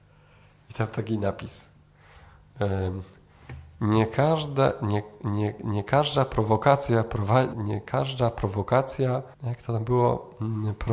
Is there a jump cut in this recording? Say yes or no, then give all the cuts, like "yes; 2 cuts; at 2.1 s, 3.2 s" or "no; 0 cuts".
yes; 2 cuts; at 7.5 s, 9.3 s